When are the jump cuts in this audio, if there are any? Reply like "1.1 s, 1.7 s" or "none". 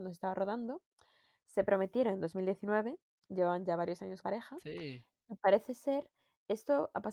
4.2 s